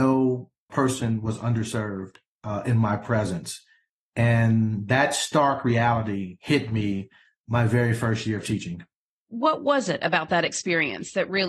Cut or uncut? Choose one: uncut